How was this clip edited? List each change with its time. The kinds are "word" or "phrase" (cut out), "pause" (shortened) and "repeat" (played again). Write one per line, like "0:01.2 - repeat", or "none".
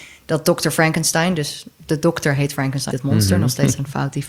0:02.9 - word